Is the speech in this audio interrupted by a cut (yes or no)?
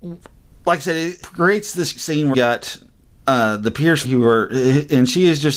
yes